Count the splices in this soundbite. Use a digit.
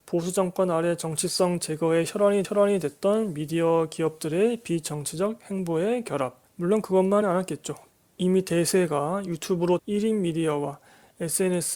3